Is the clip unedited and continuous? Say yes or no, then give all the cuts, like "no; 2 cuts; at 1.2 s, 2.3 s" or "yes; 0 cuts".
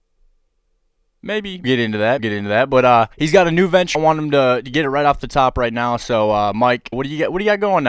no; 6 cuts; at 1.6 s, 2.2 s, 3.1 s, 3.9 s, 5.2 s, 6.9 s